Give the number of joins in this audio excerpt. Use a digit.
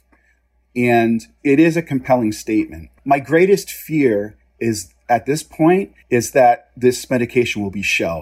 2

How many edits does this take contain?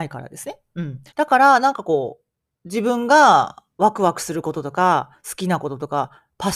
1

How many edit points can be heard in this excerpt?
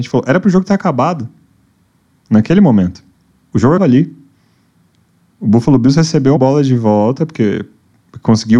3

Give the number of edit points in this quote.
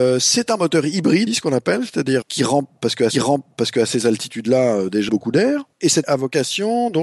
6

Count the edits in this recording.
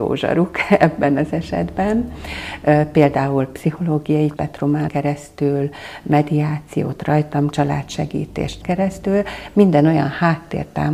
4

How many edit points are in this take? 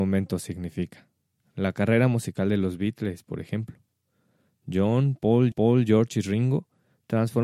2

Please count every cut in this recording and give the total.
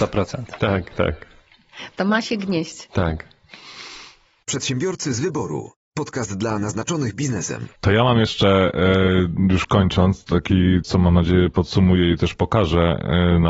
2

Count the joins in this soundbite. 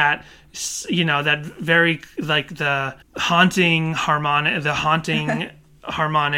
1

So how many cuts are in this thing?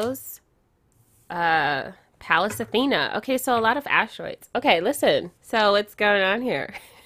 1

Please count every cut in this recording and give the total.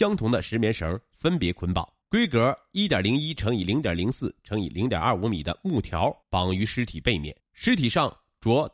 3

